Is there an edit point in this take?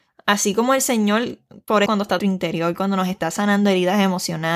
yes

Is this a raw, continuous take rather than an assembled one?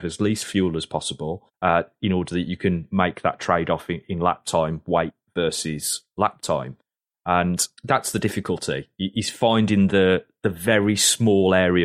no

